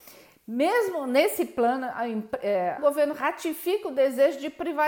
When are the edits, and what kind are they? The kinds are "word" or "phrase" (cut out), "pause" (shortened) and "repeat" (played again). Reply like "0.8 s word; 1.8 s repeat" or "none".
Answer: 2.8 s word